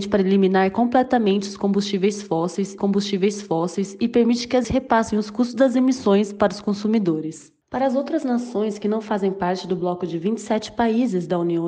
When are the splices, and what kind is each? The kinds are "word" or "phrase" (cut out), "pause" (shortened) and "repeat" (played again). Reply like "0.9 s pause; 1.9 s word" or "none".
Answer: 2.8 s repeat; 4.6 s word; 7.6 s pause